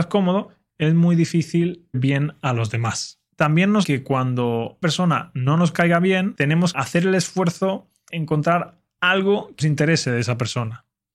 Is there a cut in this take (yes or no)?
yes